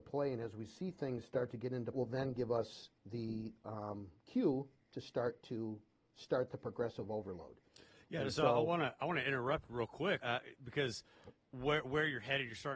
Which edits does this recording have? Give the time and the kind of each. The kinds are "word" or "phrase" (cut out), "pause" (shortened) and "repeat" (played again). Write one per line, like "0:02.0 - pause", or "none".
0:01.9 - phrase
0:10.2 - word